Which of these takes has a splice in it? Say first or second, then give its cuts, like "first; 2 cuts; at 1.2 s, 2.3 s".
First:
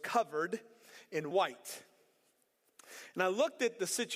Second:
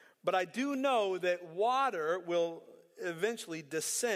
first; 1 cut; at 1.3 s